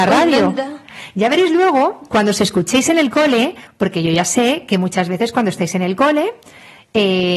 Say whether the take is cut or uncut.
uncut